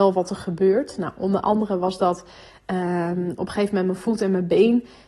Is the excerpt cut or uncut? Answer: uncut